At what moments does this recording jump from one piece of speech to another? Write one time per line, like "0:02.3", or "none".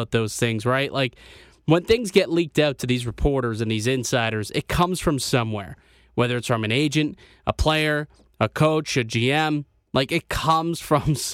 none

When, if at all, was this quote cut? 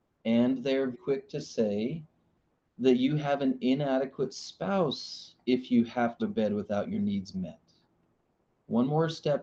0:00.9
0:06.2
0:07.3

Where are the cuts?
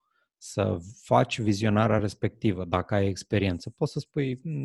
none

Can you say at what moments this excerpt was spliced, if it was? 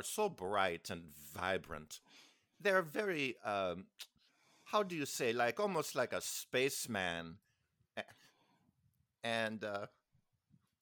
none

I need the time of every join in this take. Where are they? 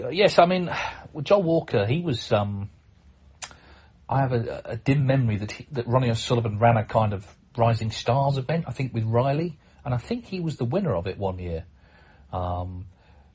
none

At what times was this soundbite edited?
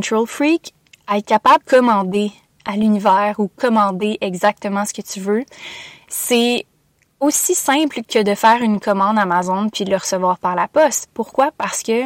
0:01.6

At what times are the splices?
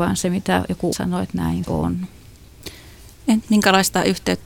0:00.9
0:01.6
0:03.4

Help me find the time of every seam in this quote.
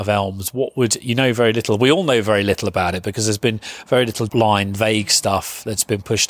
0:04.3

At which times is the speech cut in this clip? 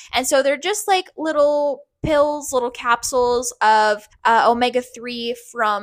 0:04.1

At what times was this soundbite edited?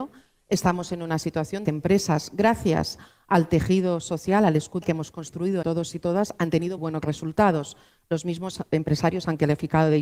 0:01.7
0:04.8
0:05.6
0:06.8

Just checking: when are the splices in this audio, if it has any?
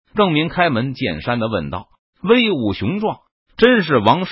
none

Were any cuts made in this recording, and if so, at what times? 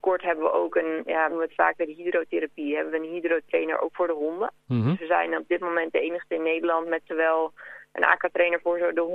0:01.3

